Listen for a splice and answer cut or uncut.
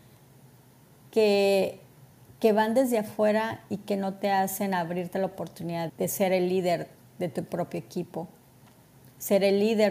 cut